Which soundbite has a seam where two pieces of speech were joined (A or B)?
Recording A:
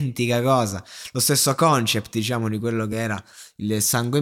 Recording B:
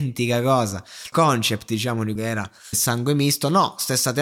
B